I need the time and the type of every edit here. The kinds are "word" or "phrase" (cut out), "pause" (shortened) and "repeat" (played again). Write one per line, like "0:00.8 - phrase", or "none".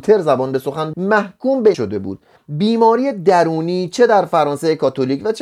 0:00.9 - word
0:01.7 - word
0:02.4 - word